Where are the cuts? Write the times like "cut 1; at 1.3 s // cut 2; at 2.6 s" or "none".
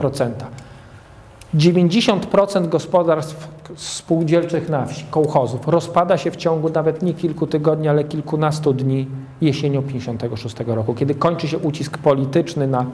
none